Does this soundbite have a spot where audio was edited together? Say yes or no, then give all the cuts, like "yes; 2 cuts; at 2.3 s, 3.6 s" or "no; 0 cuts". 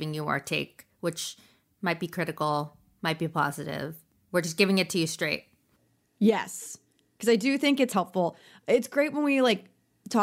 no; 0 cuts